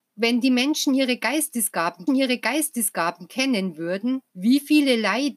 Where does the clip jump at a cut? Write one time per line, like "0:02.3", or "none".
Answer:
0:02.1
0:04.3